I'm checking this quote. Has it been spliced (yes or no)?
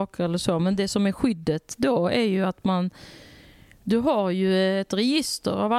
no